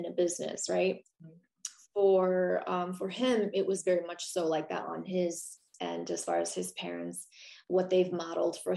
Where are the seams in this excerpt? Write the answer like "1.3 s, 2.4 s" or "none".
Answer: 1.1 s